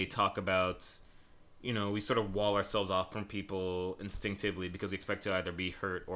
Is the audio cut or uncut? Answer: uncut